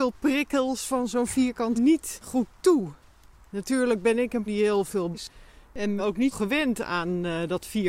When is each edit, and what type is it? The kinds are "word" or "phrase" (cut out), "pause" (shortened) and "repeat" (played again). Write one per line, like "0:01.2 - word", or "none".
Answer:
0:01.7 - word
0:04.5 - word
0:05.1 - word
0:06.0 - word
0:06.3 - word